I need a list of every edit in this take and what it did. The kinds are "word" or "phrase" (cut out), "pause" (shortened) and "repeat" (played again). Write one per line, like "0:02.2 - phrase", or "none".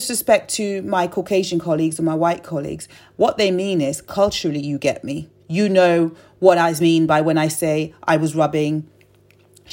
0:05.4 - pause